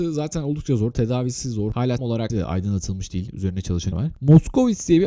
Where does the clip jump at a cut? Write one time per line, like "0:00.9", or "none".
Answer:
0:02.0
0:02.3
0:03.9